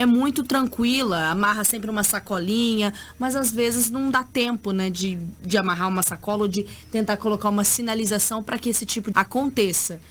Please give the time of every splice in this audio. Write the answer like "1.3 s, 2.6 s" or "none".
9.1 s